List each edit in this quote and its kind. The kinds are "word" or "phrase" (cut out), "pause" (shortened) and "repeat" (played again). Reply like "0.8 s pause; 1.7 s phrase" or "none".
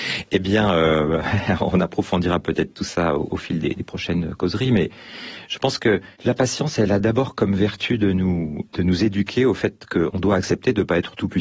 3.6 s word; 6.1 s pause